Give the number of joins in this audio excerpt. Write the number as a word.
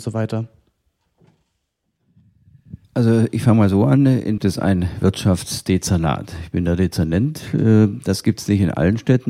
two